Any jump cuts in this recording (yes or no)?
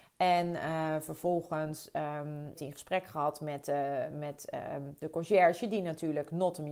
yes